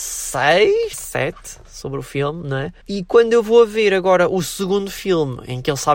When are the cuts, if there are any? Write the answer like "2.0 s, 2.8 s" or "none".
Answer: 0.9 s, 2.8 s